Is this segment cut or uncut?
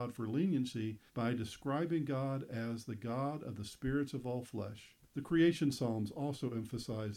cut